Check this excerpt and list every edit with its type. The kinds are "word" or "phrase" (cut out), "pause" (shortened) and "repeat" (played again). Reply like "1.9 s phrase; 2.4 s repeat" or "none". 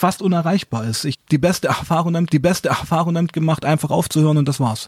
1.1 s word; 2.3 s repeat